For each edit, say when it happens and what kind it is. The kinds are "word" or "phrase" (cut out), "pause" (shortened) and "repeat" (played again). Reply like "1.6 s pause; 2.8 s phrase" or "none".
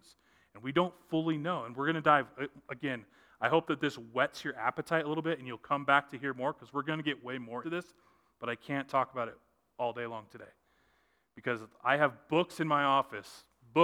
7.6 s word

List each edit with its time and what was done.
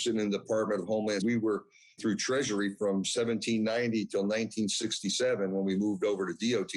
1.2 s word; 2.0 s word

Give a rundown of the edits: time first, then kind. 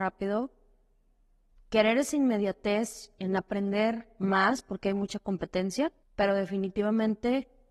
6.0 s pause

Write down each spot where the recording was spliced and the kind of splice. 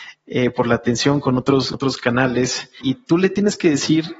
1.7 s word; 2.8 s word

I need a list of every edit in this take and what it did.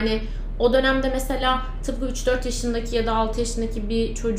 none

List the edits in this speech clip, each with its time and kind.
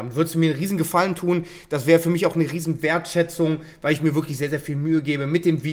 none

